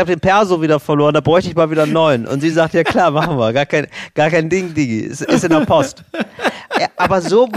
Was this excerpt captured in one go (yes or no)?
yes